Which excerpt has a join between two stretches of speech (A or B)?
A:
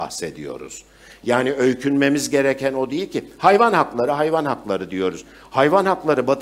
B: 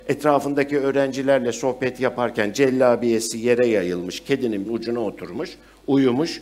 B